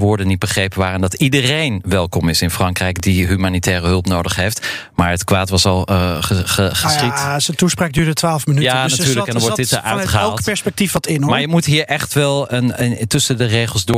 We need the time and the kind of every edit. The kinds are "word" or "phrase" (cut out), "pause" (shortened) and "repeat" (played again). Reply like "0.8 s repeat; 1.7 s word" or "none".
none